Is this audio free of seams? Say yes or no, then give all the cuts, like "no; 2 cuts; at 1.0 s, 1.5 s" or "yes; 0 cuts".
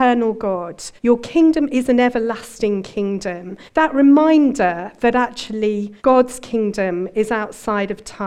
no; 3 cuts; at 1.0 s, 3.7 s, 6.0 s